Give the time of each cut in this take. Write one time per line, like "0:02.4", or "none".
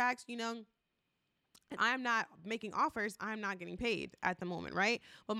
0:01.8